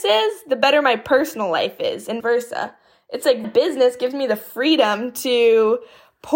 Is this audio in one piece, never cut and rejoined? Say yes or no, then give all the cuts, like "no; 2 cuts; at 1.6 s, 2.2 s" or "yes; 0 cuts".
no; 2 cuts; at 2.2 s, 3.4 s